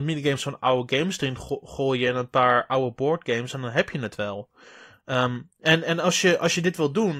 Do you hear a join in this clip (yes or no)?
no